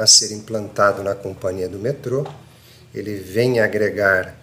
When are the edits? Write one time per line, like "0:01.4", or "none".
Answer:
none